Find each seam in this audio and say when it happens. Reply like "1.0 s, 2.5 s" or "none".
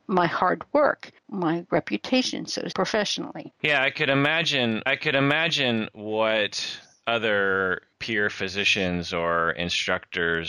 1.2 s, 2.7 s, 4.9 s, 7.9 s